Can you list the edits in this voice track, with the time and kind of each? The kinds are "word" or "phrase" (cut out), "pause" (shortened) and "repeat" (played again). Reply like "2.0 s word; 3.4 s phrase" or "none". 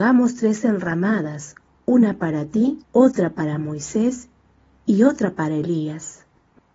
2.8 s pause